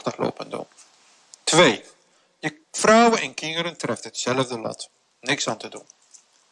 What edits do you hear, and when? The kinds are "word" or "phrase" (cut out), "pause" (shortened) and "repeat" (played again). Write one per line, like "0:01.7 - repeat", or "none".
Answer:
none